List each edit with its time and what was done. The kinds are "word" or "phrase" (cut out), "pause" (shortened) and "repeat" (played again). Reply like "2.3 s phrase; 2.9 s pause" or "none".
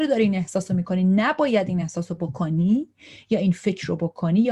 none